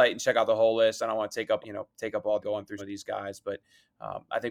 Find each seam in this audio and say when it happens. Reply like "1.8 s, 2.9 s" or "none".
1.6 s, 2.4 s, 2.8 s